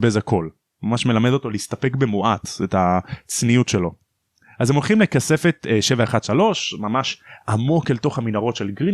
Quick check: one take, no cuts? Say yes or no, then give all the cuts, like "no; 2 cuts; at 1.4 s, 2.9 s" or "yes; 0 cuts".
yes; 0 cuts